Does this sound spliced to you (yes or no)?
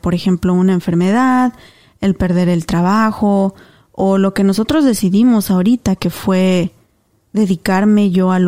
no